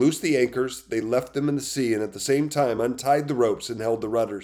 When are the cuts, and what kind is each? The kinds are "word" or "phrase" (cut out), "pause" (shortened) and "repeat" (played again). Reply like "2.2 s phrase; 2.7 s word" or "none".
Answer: none